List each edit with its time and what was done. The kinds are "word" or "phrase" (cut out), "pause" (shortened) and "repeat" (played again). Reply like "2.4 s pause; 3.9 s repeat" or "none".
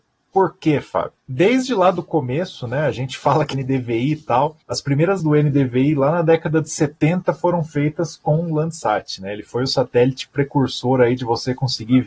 1.2 s pause; 3.5 s word; 4.6 s pause; 5.2 s word

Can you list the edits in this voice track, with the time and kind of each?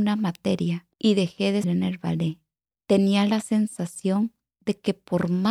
0.9 s pause; 1.6 s word; 2.7 s pause

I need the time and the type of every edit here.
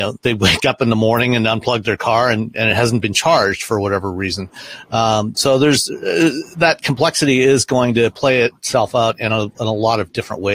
6.5 s pause

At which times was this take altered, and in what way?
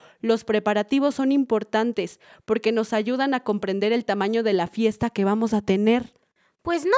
none

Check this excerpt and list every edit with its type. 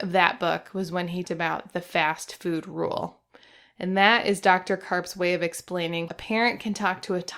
1.2 s word; 6.1 s word

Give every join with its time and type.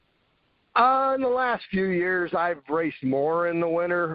none

